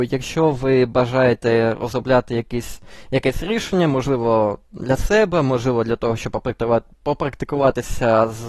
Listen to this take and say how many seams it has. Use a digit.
0